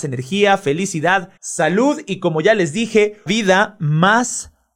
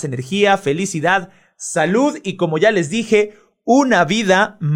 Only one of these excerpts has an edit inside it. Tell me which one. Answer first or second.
first